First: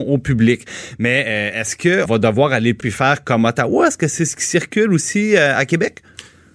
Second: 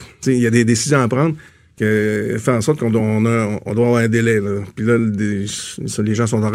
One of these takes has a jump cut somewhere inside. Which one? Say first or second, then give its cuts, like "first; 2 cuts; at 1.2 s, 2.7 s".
first; 2 cuts; at 2.1 s, 2.8 s